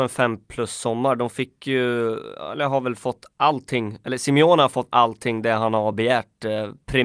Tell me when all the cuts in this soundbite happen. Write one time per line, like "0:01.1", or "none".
0:03.3